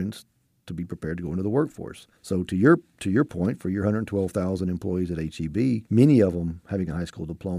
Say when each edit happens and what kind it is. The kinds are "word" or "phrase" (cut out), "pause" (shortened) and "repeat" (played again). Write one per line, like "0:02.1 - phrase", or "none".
0:02.2 - pause
0:05.9 - pause

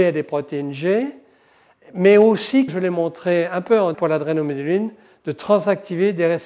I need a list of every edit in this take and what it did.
0:02.7 - phrase
0:03.9 - word

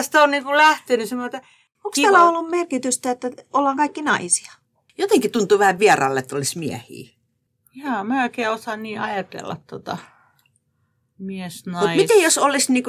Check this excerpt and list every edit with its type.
none

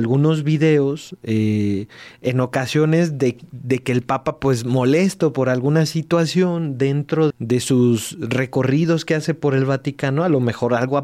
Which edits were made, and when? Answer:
0:07.3 - word

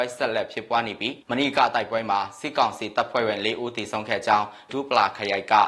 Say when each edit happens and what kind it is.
0:01.2 - pause
0:04.7 - word

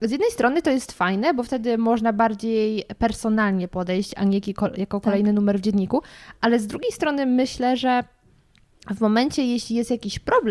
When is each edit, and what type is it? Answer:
none

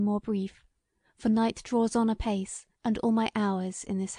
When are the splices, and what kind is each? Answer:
0:02.7 - pause

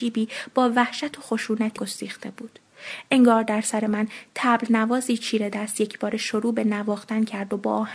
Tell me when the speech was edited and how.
0:01.8 - word

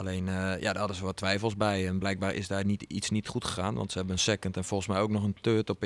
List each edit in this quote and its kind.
none

